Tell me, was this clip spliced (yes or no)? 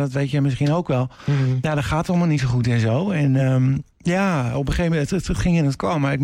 no